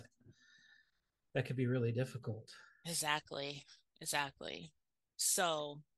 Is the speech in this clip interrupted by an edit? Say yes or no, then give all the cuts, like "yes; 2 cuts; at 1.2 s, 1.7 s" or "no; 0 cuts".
no; 0 cuts